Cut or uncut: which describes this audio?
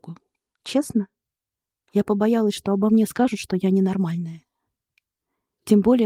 uncut